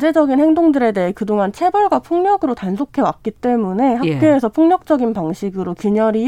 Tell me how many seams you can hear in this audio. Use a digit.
0